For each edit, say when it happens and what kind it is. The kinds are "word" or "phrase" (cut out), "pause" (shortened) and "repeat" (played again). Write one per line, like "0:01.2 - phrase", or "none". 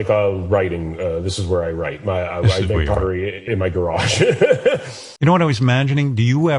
0:03.5 - word
0:05.2 - pause